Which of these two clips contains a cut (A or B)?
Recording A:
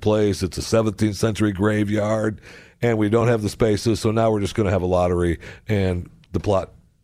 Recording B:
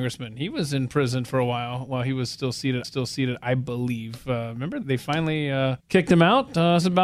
B